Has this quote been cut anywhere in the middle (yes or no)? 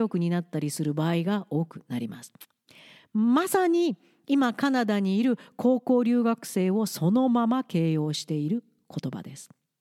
no